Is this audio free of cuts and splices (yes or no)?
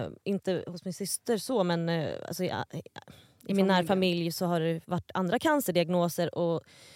no